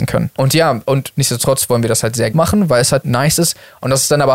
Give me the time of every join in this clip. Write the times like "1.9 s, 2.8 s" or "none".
2.3 s